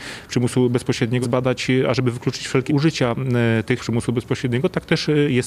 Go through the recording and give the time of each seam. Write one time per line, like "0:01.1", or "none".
0:01.2
0:02.7
0:03.8